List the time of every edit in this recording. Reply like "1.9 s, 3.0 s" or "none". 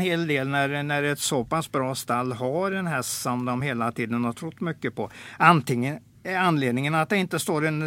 none